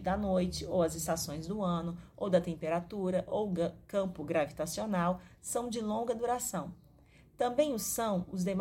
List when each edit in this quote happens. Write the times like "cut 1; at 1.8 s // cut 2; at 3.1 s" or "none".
none